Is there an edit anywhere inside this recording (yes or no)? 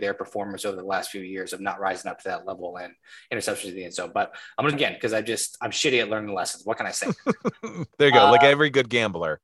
yes